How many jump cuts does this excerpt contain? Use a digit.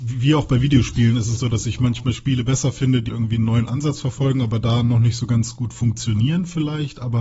2